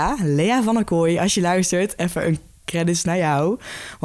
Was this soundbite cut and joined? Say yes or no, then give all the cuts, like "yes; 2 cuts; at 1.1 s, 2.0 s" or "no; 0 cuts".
no; 0 cuts